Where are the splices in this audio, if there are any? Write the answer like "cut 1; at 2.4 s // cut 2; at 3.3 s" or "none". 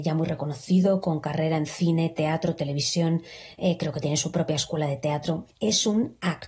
cut 1; at 5.5 s